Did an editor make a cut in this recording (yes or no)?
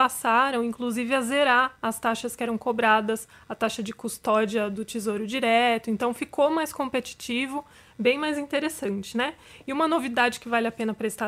no